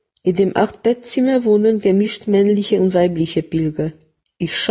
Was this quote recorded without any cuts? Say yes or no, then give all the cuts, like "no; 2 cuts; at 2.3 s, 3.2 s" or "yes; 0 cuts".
yes; 0 cuts